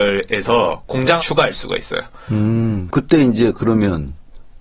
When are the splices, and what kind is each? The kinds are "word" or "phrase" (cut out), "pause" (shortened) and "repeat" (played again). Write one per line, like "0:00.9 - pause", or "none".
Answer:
0:01.2 - word